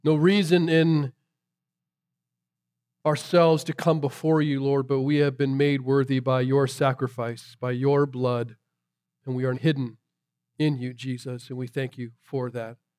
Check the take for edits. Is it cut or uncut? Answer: cut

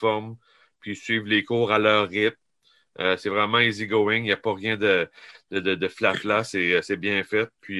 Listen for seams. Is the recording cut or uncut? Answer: uncut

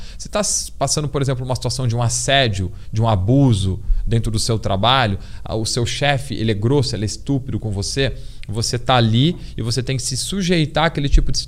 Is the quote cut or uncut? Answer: uncut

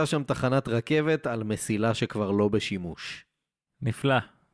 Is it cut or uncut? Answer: uncut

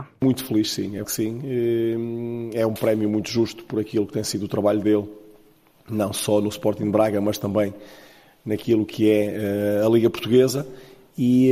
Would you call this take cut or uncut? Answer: cut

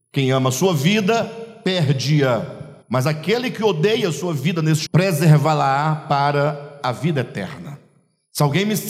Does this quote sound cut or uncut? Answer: cut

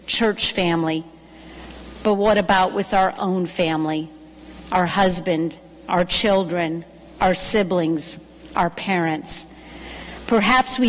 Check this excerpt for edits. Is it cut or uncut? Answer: uncut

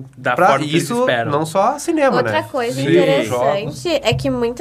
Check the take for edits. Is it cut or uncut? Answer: uncut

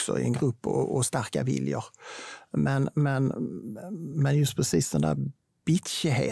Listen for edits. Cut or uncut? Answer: uncut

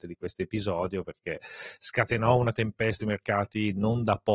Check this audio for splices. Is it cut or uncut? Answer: cut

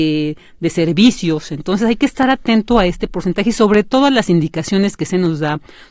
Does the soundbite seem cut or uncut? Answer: uncut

